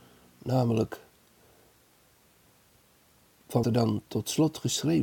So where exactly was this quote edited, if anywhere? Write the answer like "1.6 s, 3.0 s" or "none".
3.6 s